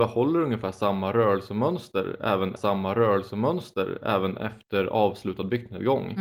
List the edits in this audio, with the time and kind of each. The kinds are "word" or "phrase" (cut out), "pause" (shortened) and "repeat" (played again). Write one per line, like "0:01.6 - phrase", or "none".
0:02.6 - repeat

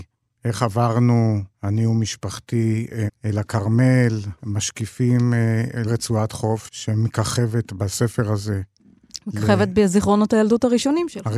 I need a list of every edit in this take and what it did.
0:01.5 - pause
0:03.1 - phrase
0:04.4 - pause
0:05.9 - word

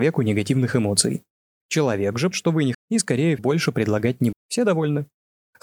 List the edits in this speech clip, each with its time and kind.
0:02.3 - word
0:02.7 - word
0:03.4 - word
0:04.3 - word

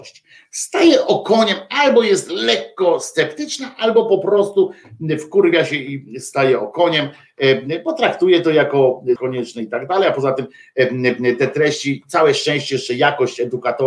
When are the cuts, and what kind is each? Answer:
0:09.2 - phrase

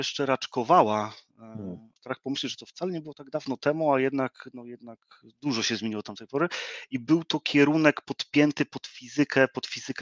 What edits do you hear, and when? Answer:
0:02.0 - pause

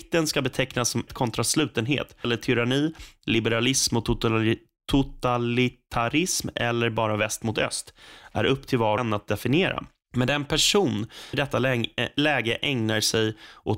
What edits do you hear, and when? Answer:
0:01.1 - word
0:02.2 - word
0:09.0 - word
0:11.3 - word

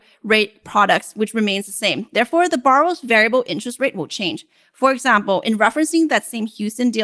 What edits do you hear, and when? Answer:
none

